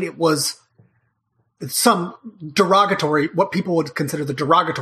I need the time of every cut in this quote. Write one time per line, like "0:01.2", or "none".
none